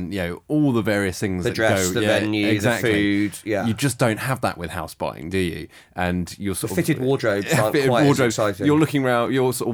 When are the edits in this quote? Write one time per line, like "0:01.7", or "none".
none

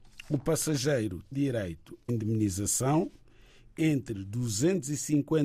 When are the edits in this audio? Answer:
0:01.3
0:02.1
0:03.8

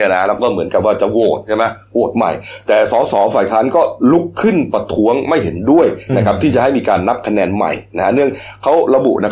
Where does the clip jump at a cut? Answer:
none

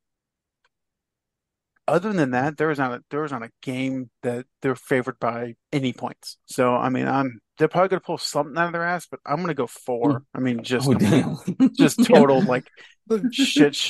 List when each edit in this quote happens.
0:04.2
0:05.6
0:06.4
0:07.5
0:10.3

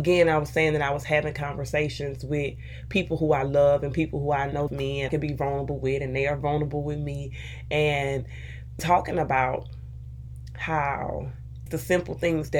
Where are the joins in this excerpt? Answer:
0:04.7
0:05.1
0:08.8
0:11.7

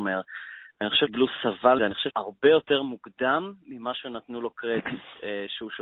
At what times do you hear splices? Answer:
0:01.1
0:01.8
0:02.1

